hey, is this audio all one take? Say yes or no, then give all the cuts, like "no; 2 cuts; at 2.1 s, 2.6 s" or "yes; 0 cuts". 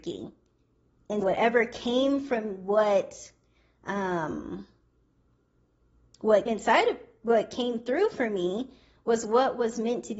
no; 2 cuts; at 1.2 s, 6.5 s